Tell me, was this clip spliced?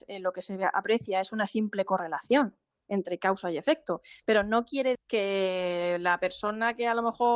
yes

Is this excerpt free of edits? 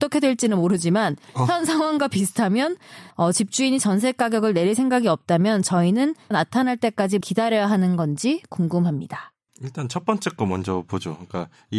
no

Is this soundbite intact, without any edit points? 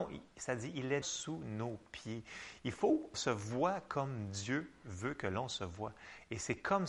no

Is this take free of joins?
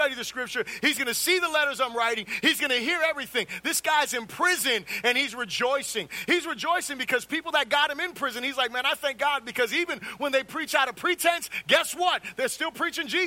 yes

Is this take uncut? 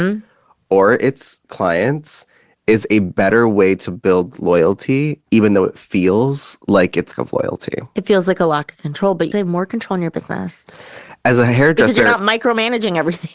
no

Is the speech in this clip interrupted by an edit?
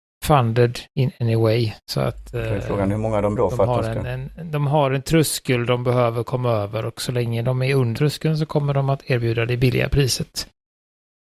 yes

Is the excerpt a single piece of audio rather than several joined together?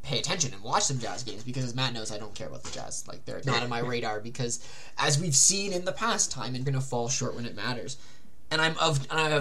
no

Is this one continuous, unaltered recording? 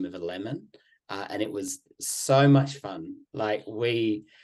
yes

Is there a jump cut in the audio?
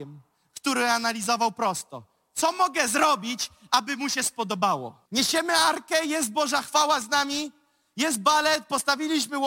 yes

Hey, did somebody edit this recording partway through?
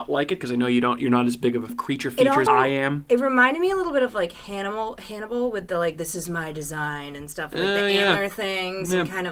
yes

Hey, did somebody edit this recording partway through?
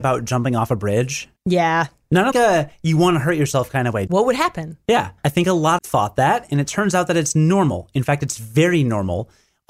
yes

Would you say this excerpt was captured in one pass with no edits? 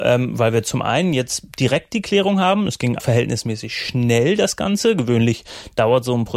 no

